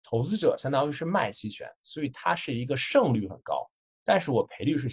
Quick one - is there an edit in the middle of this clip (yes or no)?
no